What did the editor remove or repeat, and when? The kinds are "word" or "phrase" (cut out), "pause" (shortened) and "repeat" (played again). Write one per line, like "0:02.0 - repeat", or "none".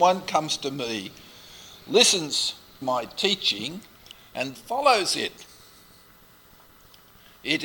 0:02.8 - word
0:04.5 - word